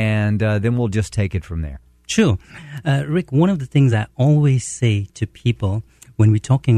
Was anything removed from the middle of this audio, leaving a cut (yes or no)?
no